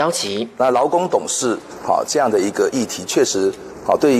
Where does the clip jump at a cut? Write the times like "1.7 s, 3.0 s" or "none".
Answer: none